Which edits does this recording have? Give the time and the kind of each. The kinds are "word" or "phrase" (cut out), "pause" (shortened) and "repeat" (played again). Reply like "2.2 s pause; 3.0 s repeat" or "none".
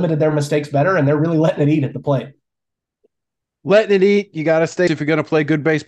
4.9 s word